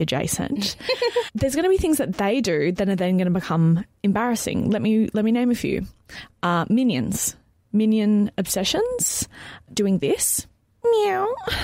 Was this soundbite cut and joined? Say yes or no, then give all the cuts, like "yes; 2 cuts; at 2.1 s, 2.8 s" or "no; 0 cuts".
yes; 1 cut; at 9.7 s